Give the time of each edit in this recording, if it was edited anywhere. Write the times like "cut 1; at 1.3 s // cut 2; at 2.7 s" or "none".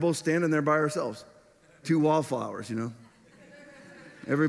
cut 1; at 1.8 s